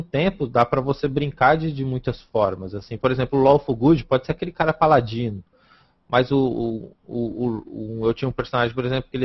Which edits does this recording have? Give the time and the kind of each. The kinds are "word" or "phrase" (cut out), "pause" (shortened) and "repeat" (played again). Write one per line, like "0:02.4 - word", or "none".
none